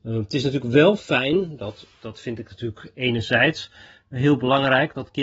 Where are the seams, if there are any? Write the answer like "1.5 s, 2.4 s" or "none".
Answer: none